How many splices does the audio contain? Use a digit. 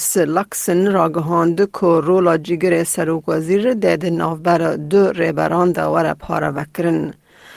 0